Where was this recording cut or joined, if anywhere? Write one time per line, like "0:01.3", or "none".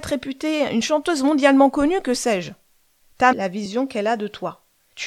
0:03.3